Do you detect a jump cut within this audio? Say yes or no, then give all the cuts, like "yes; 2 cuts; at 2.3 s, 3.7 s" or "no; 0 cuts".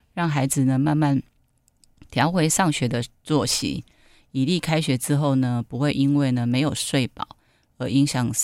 no; 0 cuts